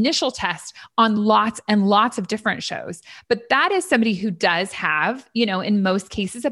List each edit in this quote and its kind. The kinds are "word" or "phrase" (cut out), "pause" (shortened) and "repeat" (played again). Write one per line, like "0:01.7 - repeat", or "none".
none